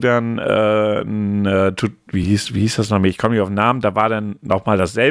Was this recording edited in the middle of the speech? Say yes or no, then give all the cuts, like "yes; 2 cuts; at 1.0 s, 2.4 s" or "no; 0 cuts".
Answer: no; 0 cuts